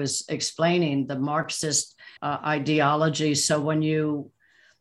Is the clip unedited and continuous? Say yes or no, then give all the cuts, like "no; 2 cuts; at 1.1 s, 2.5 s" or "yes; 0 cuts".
no; 1 cut; at 2.2 s